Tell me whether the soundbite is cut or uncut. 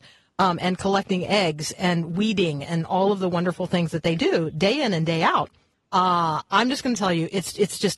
uncut